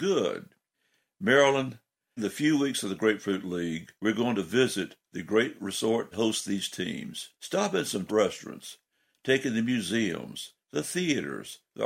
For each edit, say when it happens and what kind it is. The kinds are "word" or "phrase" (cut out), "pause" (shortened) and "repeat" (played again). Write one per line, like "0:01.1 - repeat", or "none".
0:02.2 - word
0:04.0 - pause
0:06.1 - phrase
0:07.4 - pause
0:08.1 - word